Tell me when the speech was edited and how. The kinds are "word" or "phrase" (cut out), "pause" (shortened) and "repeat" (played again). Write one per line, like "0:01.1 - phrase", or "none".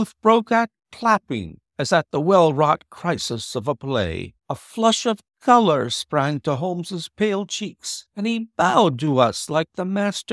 0:04.4 - pause